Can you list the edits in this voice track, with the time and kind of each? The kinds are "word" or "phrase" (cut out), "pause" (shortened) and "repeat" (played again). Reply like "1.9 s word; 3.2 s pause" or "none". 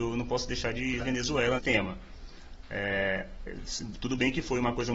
1.0 s word; 1.6 s phrase